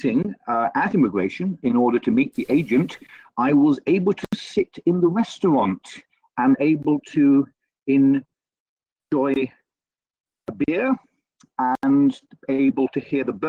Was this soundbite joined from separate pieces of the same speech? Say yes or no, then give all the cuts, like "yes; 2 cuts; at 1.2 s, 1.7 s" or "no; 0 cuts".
no; 0 cuts